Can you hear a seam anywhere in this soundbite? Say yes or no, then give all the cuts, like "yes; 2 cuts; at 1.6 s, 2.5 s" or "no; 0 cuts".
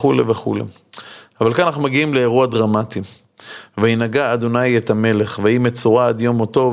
no; 0 cuts